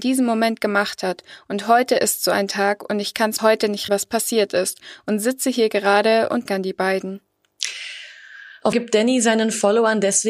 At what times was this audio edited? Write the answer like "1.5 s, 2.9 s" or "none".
3.4 s, 3.9 s, 6.5 s, 8.7 s